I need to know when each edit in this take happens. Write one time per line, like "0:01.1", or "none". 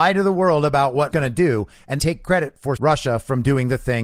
0:01.1
0:02.0
0:02.8